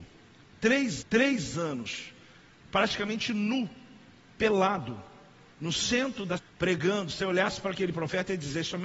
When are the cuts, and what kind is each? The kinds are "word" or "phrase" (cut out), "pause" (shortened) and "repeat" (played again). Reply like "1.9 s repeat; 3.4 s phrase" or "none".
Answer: 1.0 s repeat; 6.4 s word